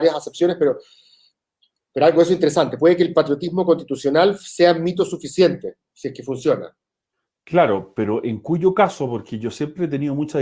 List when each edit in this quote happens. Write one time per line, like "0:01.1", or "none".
none